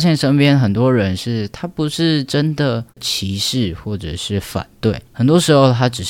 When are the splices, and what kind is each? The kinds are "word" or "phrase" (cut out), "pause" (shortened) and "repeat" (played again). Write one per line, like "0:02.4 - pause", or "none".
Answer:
0:02.9 - pause
0:05.0 - pause